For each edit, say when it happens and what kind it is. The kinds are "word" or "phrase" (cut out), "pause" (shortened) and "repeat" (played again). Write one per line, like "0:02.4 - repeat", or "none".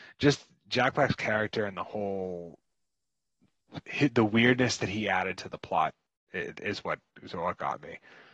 none

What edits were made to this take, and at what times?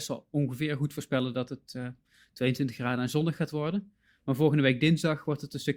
none

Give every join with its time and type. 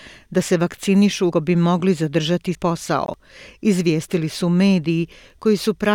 0:01.3 - word
0:02.5 - word

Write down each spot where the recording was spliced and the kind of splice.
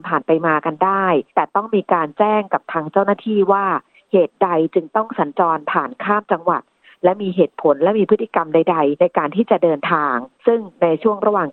0:01.3 - pause
0:09.0 - word
0:10.3 - pause

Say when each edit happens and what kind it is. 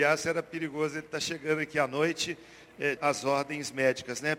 0:03.0 - word

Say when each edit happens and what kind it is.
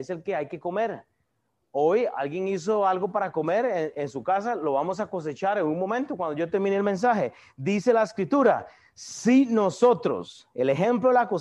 none

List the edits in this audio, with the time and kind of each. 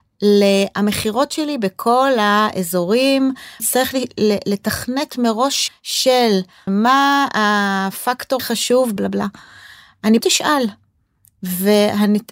0:03.6 - word
0:05.7 - word
0:06.7 - word
0:08.4 - word
0:09.0 - word
0:10.2 - word

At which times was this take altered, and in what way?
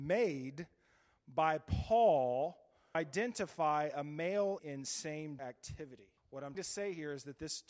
0:02.9 - word
0:04.6 - word
0:05.4 - word
0:06.2 - pause
0:06.5 - word

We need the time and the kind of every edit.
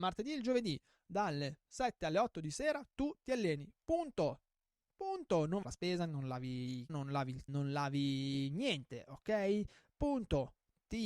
0:05.6 - phrase
0:06.9 - word
0:07.5 - phrase

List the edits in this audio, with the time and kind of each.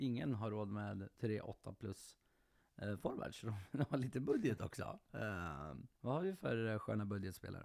0:05.9 - pause

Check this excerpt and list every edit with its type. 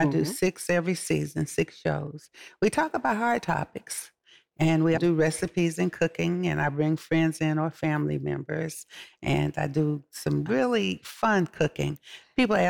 0:05.0 - word

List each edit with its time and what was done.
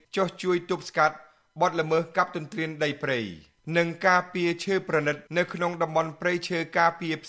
0:05.3 - pause

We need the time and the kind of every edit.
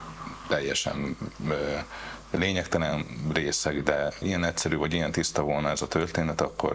0:04.2 - word

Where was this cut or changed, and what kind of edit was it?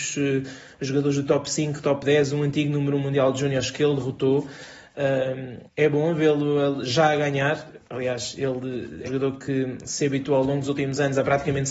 0:05.7 - pause
0:09.1 - word

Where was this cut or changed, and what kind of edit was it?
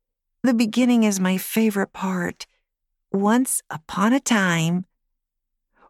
none

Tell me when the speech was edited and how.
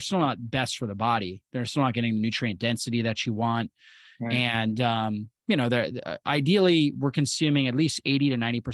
none

